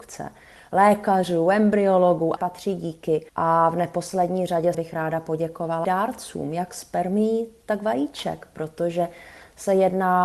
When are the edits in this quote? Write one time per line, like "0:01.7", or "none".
0:02.4
0:03.3
0:04.7
0:05.8